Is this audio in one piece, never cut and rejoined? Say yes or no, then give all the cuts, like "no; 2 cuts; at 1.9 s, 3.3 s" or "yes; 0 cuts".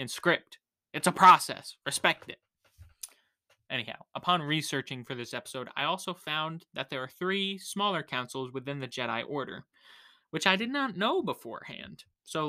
yes; 0 cuts